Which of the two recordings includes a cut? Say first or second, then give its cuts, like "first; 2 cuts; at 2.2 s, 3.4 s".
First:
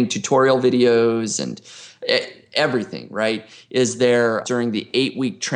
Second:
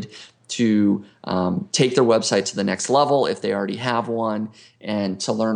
first; 1 cut; at 4.4 s